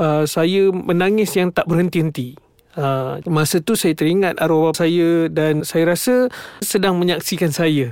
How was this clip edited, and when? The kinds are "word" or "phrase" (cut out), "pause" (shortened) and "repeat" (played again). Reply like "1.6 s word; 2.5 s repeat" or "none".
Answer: 3.2 s word; 4.7 s word; 5.6 s word; 6.6 s word